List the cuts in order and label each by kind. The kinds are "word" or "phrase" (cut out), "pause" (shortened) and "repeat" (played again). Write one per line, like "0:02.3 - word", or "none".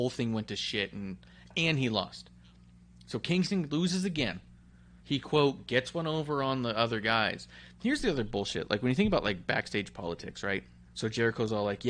0:05.0 - pause
0:10.9 - pause